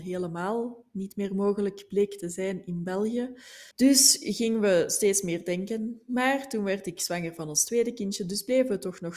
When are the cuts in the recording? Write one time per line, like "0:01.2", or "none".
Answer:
0:03.7